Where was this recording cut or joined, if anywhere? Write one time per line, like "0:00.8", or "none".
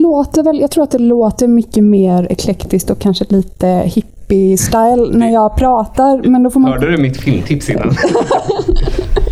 none